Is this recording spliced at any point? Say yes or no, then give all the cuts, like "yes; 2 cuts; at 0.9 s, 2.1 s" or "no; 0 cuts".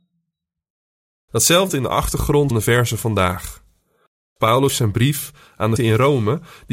yes; 4 cuts; at 1.7 s, 2.5 s, 4.7 s, 5.8 s